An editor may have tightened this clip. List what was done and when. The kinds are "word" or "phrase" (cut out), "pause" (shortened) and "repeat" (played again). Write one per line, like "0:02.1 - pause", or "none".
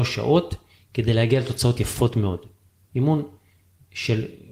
none